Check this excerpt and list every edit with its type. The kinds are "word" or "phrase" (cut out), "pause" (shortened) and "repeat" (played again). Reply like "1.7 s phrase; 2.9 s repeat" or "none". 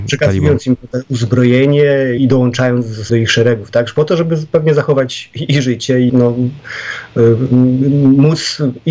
2.2 s word; 3.1 s word; 6.1 s word